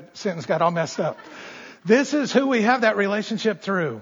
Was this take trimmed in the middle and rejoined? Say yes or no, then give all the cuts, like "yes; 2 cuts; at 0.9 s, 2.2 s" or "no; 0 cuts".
no; 0 cuts